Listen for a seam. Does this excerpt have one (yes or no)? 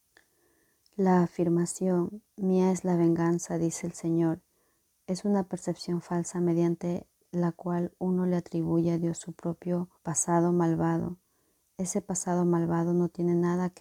yes